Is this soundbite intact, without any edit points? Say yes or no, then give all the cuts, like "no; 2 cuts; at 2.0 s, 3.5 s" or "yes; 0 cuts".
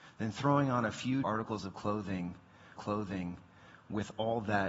no; 2 cuts; at 1.2 s, 2.8 s